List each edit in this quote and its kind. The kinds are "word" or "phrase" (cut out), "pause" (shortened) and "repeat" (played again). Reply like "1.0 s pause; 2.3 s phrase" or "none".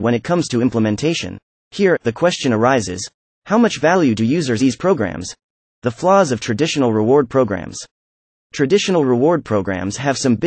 4.6 s phrase

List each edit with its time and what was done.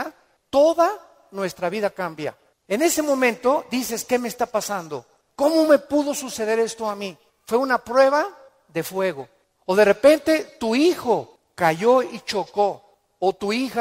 none

